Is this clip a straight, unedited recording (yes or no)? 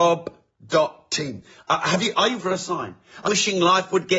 no